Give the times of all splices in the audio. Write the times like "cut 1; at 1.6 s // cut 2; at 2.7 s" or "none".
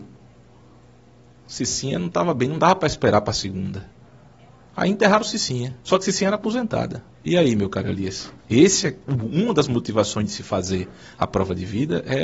cut 1; at 5.8 s // cut 2; at 7.1 s // cut 3; at 8.4 s